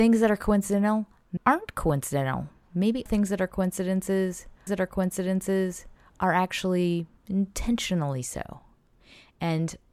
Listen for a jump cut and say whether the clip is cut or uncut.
cut